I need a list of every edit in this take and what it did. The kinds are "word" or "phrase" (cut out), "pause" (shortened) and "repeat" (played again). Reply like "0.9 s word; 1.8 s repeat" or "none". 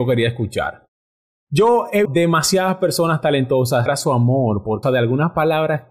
2.0 s word; 3.9 s word; 4.8 s word